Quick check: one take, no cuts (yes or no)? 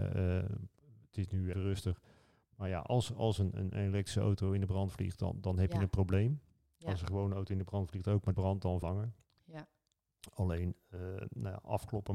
no